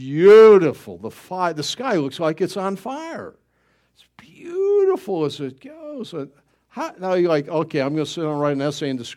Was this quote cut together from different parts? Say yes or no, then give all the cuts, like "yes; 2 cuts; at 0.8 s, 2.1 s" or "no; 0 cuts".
no; 0 cuts